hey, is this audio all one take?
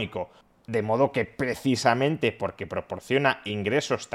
yes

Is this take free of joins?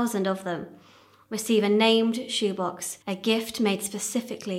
no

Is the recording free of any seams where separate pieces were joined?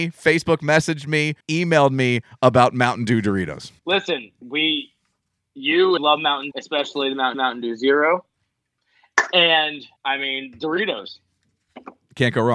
no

